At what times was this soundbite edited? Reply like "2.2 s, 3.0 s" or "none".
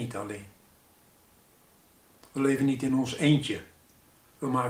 none